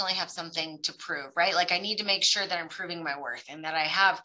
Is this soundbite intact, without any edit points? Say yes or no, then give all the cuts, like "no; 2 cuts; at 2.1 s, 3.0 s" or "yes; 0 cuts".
yes; 0 cuts